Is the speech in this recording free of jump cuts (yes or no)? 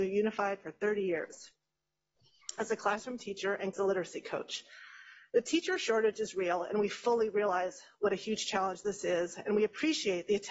no